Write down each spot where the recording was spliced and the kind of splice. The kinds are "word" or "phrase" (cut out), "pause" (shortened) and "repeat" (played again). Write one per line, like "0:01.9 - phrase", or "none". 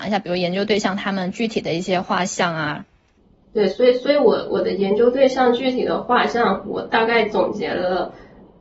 0:03.2 - pause

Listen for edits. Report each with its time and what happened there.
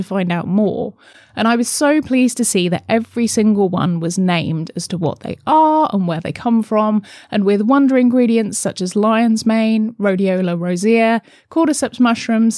none

